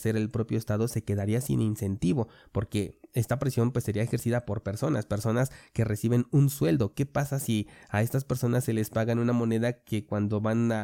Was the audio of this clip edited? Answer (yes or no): no